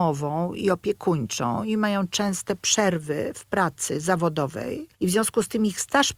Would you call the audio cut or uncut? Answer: cut